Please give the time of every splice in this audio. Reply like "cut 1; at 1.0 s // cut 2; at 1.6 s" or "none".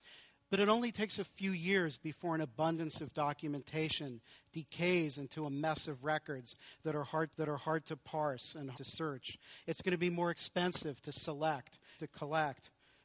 cut 1; at 7.3 s // cut 2; at 8.7 s // cut 3; at 12.0 s